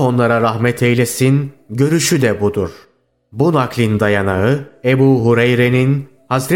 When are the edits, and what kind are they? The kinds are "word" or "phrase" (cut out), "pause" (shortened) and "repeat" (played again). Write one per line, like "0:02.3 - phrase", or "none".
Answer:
none